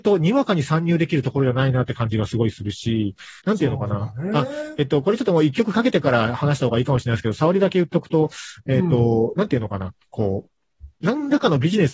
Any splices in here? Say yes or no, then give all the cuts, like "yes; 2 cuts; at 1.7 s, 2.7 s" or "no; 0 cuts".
yes; 1 cut; at 3.4 s